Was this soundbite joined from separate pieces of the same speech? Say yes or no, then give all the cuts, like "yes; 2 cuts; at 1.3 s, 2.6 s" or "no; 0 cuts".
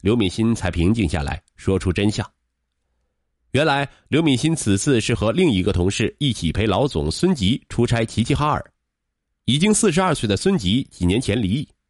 no; 0 cuts